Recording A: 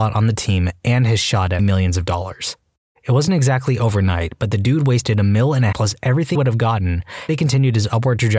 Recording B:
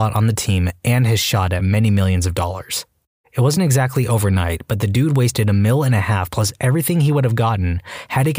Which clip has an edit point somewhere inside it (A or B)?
A